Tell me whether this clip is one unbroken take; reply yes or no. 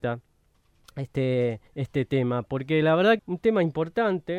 no